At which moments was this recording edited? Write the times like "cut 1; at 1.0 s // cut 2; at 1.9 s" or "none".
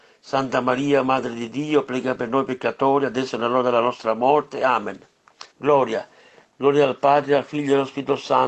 cut 1; at 5.5 s